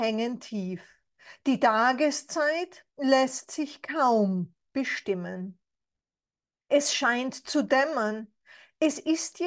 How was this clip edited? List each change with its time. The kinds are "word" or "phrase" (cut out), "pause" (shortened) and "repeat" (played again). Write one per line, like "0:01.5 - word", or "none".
0:02.9 - pause